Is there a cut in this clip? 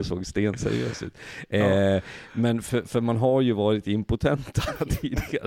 no; 0 cuts

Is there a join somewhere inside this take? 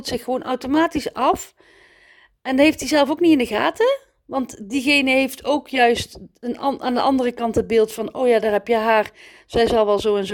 no; 0 cuts

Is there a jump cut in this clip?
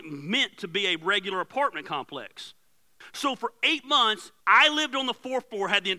yes; 1 cut; at 4.4 s

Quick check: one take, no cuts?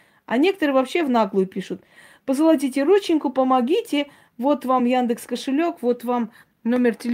yes; 0 cuts

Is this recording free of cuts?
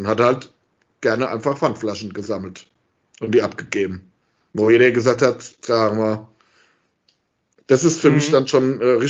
yes; 0 cuts

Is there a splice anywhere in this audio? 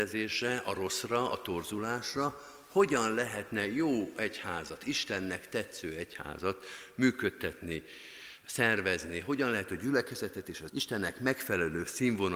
yes; 1 cut; at 10.7 s

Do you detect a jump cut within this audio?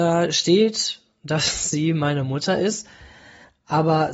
no; 0 cuts

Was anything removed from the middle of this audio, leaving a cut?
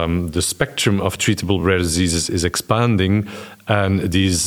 no; 0 cuts

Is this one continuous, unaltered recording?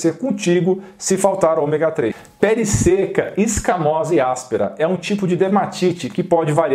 yes; 0 cuts

